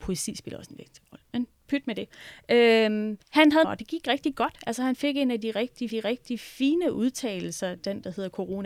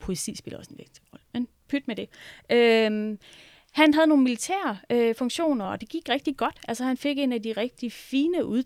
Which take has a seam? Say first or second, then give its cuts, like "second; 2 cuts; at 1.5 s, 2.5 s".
first; 3 cuts; at 3.2 s, 3.6 s, 5.9 s